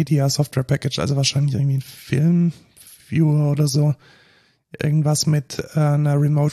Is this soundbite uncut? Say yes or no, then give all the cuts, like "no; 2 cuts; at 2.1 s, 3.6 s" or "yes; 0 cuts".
yes; 0 cuts